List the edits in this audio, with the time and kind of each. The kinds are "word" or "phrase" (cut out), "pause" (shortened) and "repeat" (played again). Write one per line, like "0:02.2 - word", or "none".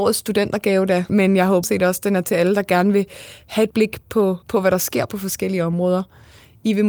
0:01.1 - word
0:01.6 - word
0:03.7 - word
0:04.4 - pause